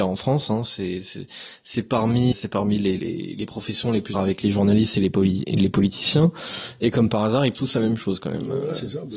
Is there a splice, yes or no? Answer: yes